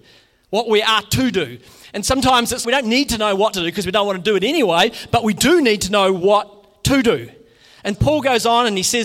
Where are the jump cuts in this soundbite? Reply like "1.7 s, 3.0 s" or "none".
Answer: 2.6 s, 3.5 s, 7.9 s